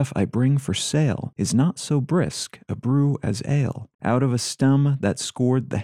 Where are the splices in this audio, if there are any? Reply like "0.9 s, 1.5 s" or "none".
3.9 s